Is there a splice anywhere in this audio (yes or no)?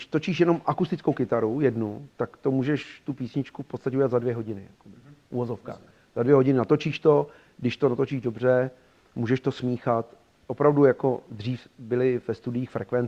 no